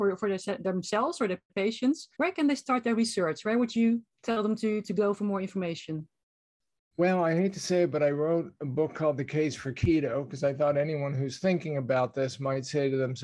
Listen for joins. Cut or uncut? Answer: cut